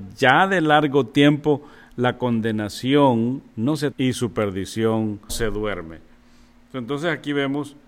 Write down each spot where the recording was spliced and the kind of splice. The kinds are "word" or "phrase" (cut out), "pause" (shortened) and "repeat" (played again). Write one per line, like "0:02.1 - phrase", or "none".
0:03.9 - word
0:05.3 - word